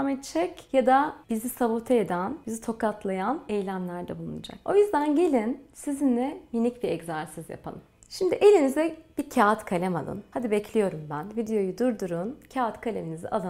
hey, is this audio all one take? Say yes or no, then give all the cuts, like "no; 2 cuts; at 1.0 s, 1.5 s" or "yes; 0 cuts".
yes; 0 cuts